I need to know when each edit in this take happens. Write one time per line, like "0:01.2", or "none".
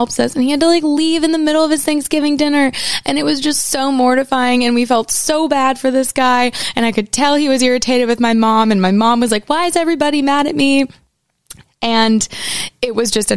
none